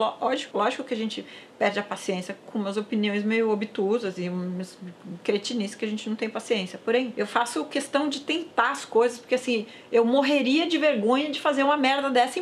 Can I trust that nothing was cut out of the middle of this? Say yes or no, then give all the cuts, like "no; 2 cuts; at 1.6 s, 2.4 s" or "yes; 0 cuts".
yes; 0 cuts